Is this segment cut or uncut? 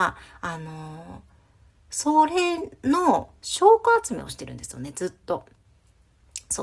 uncut